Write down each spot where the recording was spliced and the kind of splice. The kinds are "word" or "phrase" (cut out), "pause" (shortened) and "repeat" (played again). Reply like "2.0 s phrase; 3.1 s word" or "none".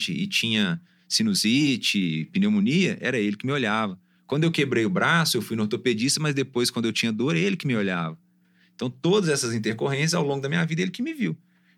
none